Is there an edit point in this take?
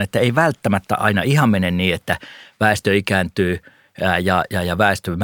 no; 0 cuts

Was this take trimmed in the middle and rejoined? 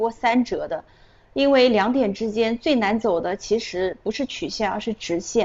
no; 0 cuts

